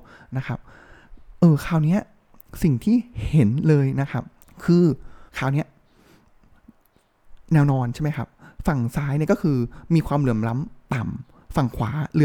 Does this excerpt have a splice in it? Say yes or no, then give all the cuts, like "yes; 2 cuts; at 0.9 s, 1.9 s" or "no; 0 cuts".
yes; 2 cuts; at 4.4 s, 5.3 s